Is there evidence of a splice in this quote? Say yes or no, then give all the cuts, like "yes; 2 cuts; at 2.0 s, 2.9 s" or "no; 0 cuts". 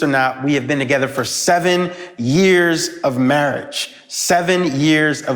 no; 0 cuts